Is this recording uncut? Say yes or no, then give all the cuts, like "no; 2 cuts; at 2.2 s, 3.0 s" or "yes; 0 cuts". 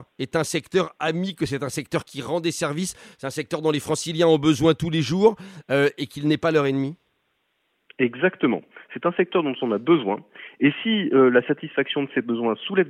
yes; 0 cuts